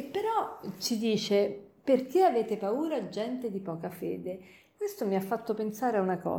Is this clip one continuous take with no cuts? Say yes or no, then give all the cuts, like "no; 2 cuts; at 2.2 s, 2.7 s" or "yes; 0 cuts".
yes; 0 cuts